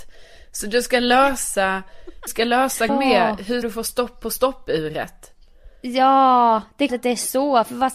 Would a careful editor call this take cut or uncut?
cut